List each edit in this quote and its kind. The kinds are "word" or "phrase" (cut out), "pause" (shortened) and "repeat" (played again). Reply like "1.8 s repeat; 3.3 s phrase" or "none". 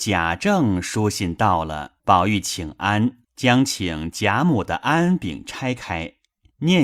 2.0 s pause; 3.2 s pause